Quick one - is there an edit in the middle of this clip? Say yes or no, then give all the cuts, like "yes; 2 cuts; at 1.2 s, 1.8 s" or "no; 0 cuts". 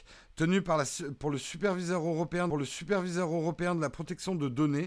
yes; 1 cut; at 2.5 s